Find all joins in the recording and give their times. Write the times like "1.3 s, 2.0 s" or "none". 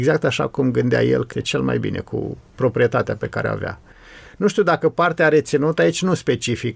1.3 s

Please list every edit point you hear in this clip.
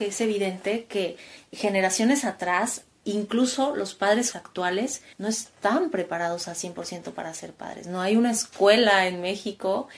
4.3 s, 5.1 s

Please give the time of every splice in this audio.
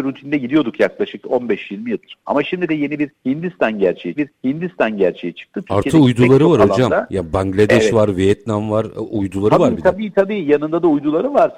2.7 s, 4.2 s

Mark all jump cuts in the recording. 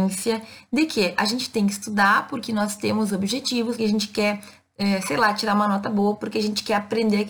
3.8 s

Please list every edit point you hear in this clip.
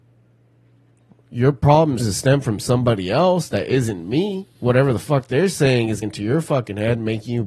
2.0 s, 4.5 s, 6.0 s

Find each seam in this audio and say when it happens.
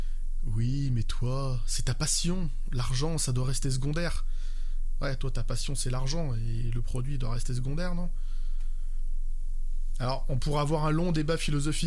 none

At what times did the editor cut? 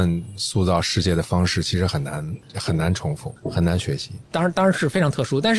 3.4 s, 4.2 s

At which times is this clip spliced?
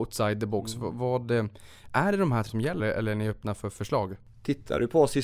2.5 s, 2.8 s

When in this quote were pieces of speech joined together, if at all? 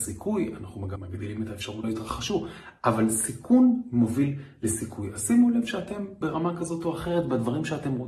1.0 s, 1.8 s, 6.2 s

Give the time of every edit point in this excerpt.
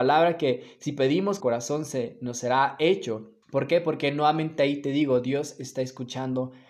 1.4 s, 3.4 s

